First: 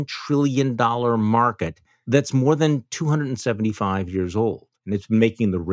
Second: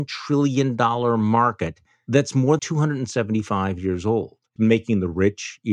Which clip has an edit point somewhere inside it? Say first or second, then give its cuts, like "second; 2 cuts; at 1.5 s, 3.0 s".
second; 2 cuts; at 2.6 s, 4.6 s